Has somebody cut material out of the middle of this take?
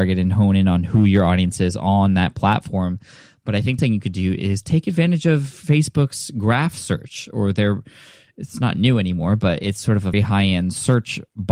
yes; 2 cuts; at 3.8 s, 10.1 s

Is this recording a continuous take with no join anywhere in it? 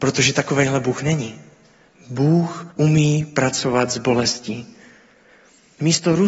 no; 1 cut; at 2.7 s

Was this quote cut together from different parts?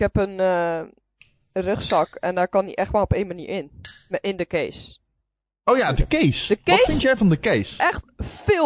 no; 0 cuts

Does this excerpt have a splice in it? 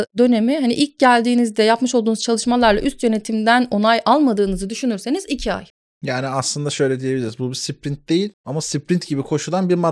no; 0 cuts

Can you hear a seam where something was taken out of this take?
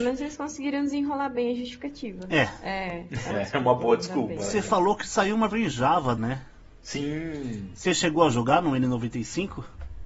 yes; 3 cuts; at 3.3 s, 5.5 s, 6.2 s

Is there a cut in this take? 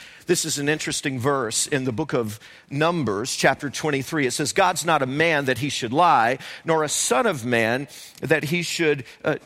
no; 0 cuts

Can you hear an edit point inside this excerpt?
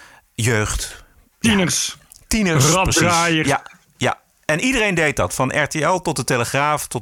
no; 0 cuts

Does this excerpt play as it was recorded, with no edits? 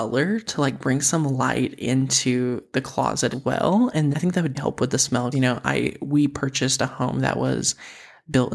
no; 4 cuts; at 3.3 s, 4.1 s, 4.5 s, 5.3 s

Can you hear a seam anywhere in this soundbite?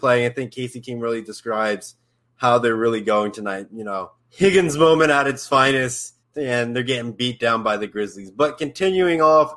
yes; 2 cuts; at 4.2 s, 6.2 s

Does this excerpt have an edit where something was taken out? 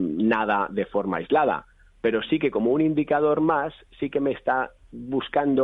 no; 0 cuts

